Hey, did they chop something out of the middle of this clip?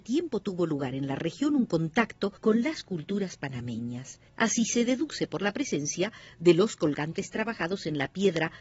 yes; 2 cuts; at 2.4 s, 4.3 s

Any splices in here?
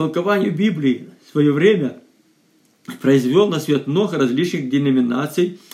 no; 0 cuts

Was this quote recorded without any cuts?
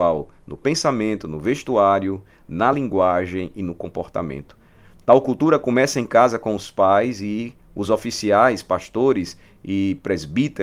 yes; 0 cuts

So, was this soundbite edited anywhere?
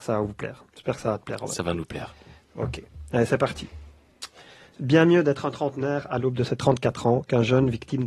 no; 0 cuts

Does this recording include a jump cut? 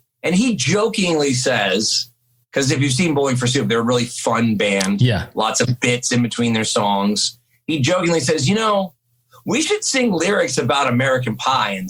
no; 0 cuts

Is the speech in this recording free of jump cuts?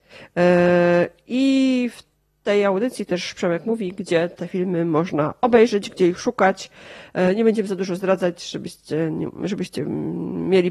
yes; 0 cuts

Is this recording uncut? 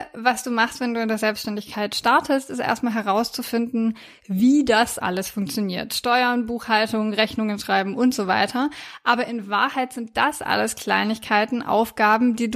no; 1 cut; at 5.0 s

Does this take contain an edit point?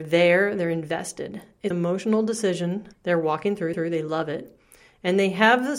yes; 3 cuts; at 1.7 s, 2.9 s, 3.7 s

